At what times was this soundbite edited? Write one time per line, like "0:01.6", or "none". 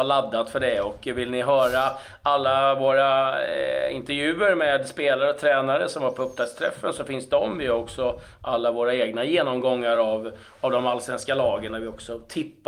none